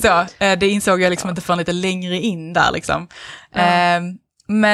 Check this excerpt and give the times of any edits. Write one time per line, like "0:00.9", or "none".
none